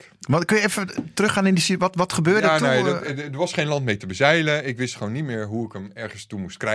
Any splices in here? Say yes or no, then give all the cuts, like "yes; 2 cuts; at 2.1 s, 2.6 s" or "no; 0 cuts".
no; 0 cuts